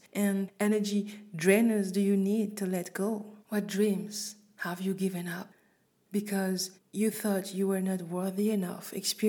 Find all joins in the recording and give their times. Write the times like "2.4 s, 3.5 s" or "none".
3.4 s, 6.8 s